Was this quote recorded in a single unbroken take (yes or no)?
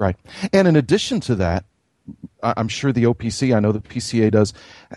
no